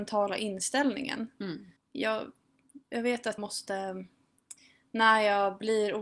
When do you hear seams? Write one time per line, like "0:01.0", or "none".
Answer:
0:01.8
0:03.4